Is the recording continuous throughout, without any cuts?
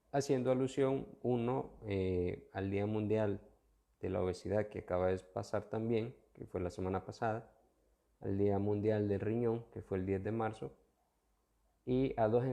yes; 0 cuts

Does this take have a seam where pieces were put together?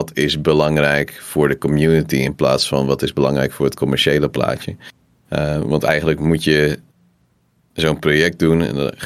no; 0 cuts

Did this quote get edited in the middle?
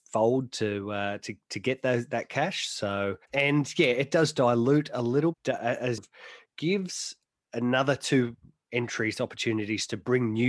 yes; 3 cuts; at 3.2 s, 5.3 s, 6.0 s

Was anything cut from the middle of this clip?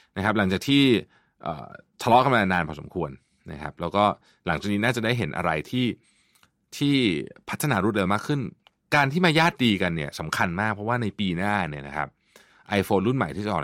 no; 0 cuts

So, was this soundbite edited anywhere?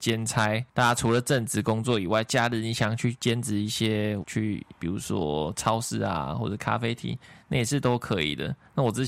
yes; 1 cut; at 4.2 s

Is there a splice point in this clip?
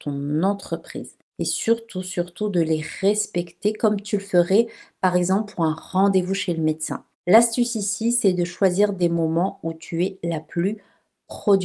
no; 0 cuts

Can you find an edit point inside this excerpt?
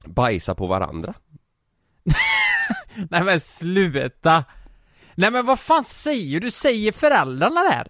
no; 0 cuts

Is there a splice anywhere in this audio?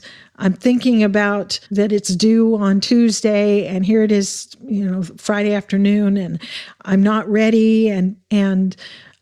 yes; 1 cut; at 1.7 s

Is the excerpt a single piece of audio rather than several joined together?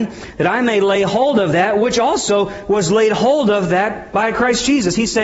yes; 0 cuts

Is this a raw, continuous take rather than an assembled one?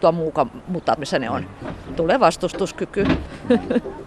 no; 1 cut; at 1.0 s

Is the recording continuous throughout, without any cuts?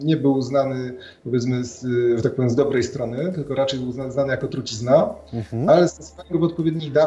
yes; 0 cuts

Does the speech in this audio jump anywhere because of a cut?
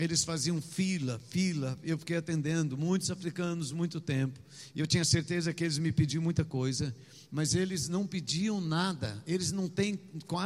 no; 0 cuts

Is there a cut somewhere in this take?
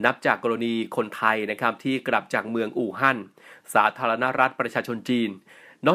no; 0 cuts

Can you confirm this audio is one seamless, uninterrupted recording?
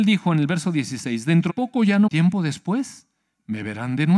no; 2 cuts; at 1.5 s, 2.1 s

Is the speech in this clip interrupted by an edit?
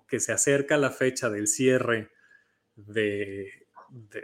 no; 0 cuts

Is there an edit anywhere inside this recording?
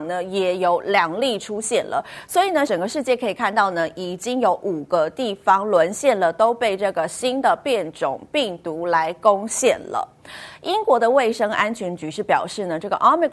yes; 1 cut; at 2.7 s

